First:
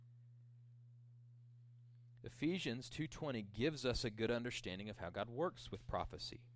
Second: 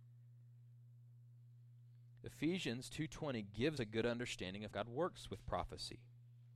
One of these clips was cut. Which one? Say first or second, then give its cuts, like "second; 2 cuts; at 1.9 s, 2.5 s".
second; 2 cuts; at 3.8 s, 4.7 s